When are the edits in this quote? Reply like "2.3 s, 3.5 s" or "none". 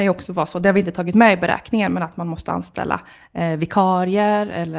none

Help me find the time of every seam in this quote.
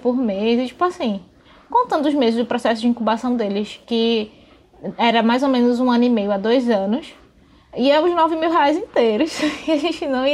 none

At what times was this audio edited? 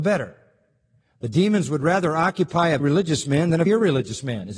2.8 s, 3.7 s

